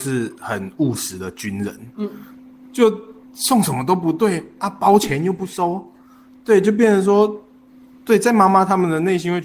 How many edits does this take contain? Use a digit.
0